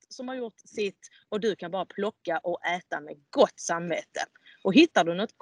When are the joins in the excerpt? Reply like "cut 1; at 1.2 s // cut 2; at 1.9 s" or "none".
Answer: none